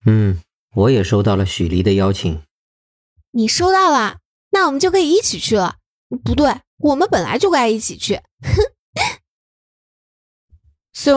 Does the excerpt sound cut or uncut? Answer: cut